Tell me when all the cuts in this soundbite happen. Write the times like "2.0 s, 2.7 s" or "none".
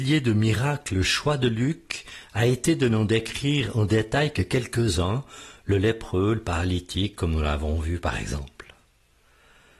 none